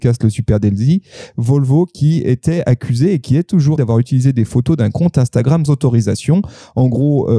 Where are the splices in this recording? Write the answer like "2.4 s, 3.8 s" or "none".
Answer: 3.8 s, 5.7 s